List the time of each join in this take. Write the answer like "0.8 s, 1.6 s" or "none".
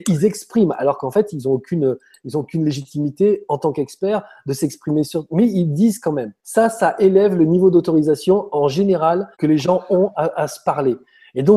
6.4 s, 9.3 s